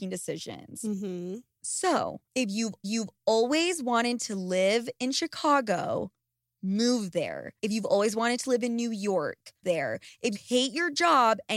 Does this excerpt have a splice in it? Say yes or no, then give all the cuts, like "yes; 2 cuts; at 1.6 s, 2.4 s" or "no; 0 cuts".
yes; 5 cuts; at 2.3 s, 2.8 s, 7.6 s, 9.6 s, 10.3 s